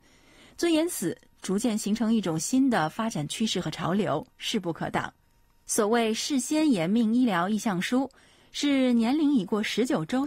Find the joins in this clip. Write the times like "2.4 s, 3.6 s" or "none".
none

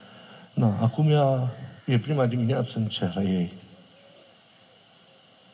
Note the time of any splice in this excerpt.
1.8 s

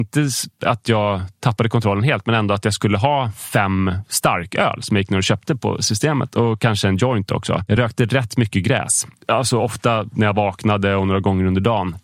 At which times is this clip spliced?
none

